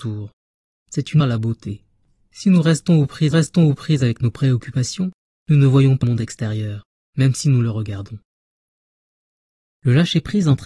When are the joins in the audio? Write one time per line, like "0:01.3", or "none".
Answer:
0:01.2
0:03.3
0:06.0